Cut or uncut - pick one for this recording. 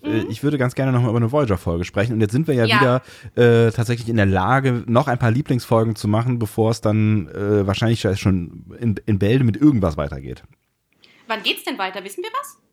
uncut